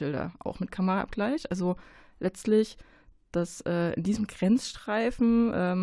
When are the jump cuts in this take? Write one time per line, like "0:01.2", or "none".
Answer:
none